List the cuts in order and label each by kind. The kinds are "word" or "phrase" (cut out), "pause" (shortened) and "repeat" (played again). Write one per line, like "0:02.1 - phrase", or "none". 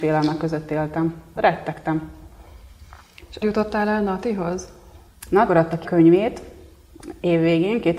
0:01.4 - word
0:03.4 - word
0:05.5 - word
0:05.8 - word